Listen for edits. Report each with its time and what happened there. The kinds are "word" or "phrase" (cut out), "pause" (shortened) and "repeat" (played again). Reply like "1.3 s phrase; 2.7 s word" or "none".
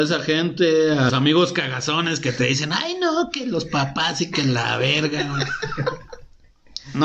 1.1 s word